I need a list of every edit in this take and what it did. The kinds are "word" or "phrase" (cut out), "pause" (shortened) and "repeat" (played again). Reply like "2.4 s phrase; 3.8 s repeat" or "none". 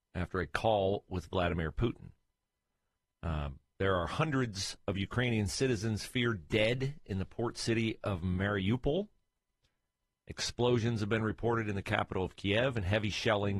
none